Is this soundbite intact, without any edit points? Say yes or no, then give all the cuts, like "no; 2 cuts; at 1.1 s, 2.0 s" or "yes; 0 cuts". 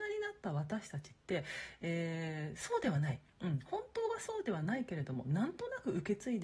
yes; 0 cuts